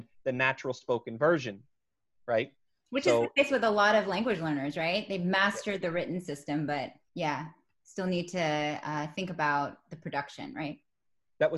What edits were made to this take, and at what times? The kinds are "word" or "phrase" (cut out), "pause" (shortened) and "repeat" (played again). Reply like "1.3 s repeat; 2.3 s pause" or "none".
7.1 s word